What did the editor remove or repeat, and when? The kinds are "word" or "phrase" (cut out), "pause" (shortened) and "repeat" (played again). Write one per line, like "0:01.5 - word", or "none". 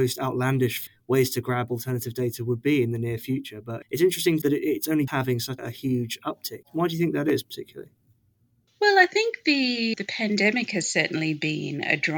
0:04.4 - word
0:05.1 - word
0:05.6 - word
0:09.9 - word